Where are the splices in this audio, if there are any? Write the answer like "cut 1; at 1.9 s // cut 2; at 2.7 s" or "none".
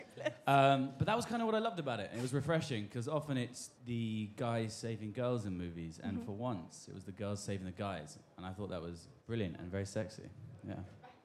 cut 1; at 3.8 s // cut 2; at 9.2 s

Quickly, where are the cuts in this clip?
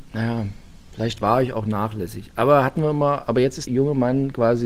cut 1; at 3.7 s

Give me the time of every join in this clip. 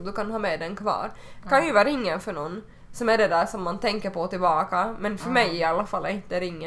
none

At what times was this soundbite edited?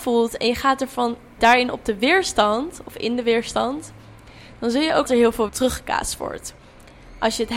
cut 1; at 1.4 s // cut 2; at 5.1 s // cut 3; at 5.5 s

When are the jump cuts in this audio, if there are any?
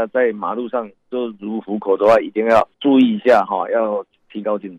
cut 1; at 2.7 s

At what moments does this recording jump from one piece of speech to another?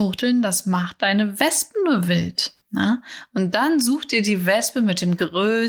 cut 1; at 2.6 s

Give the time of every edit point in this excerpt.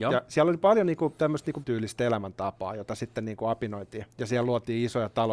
cut 1; at 1.6 s // cut 2; at 4.1 s

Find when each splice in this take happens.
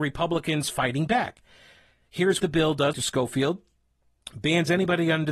cut 1; at 2.4 s // cut 2; at 2.9 s

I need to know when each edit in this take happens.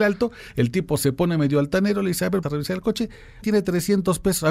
cut 1; at 2.4 s // cut 2; at 3.4 s

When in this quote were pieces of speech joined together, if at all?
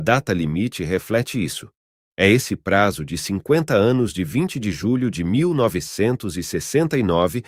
none

